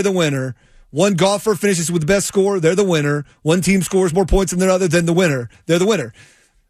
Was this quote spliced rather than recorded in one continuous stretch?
no; 0 cuts

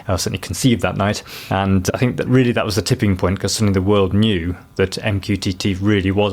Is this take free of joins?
yes; 0 cuts

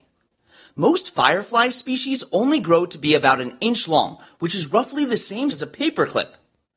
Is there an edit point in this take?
yes; 1 cut; at 5.5 s

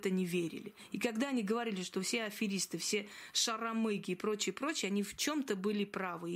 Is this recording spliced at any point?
no; 0 cuts

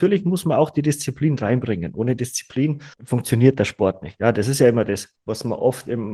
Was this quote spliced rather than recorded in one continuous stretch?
yes; 2 cuts; at 2.9 s, 5.2 s

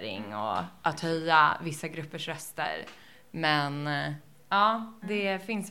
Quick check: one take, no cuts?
yes; 0 cuts

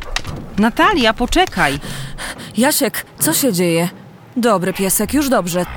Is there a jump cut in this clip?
no; 0 cuts

